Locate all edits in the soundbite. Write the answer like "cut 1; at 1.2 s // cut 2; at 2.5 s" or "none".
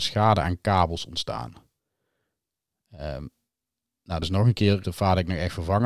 cut 1; at 4.2 s // cut 2; at 4.8 s